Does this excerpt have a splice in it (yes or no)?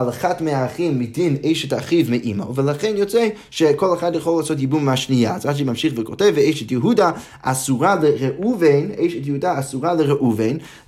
no